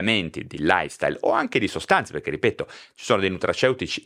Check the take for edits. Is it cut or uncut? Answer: uncut